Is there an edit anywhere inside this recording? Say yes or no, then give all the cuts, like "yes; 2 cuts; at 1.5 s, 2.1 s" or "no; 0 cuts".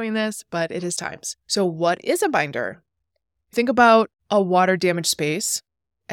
yes; 4 cuts; at 1.0 s, 1.4 s, 3.5 s, 4.2 s